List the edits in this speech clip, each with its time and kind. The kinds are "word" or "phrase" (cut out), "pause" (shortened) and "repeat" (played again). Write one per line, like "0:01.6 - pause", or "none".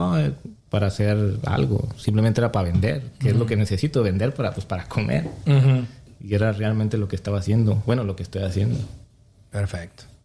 none